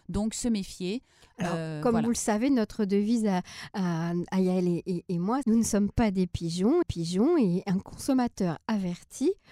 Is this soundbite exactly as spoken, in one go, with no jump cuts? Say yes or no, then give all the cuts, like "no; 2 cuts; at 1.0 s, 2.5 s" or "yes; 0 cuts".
no; 2 cuts; at 5.4 s, 6.8 s